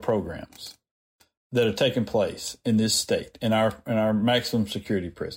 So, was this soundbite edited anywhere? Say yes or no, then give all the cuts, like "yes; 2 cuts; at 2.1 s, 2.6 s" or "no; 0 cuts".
no; 0 cuts